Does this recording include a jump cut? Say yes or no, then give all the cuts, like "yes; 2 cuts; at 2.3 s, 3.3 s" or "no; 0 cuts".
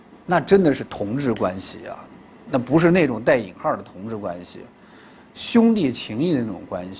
no; 0 cuts